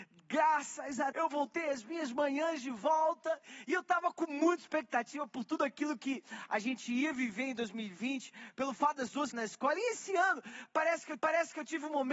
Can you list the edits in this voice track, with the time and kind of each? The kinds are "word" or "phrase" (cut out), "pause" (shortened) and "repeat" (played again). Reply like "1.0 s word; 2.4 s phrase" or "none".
1.1 s word; 9.3 s phrase; 11.2 s repeat